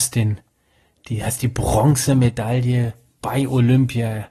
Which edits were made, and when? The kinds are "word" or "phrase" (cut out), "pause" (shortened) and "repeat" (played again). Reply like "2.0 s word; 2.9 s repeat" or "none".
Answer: none